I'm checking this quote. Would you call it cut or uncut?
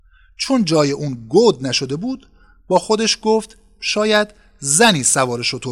uncut